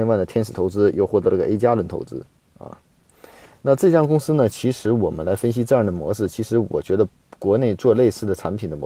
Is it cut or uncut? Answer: uncut